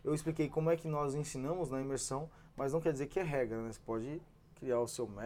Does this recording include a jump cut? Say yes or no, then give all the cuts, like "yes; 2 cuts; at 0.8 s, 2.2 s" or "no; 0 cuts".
no; 0 cuts